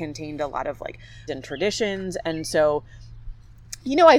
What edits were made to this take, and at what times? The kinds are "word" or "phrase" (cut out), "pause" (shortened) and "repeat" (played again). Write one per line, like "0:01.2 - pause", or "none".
0:01.3 - word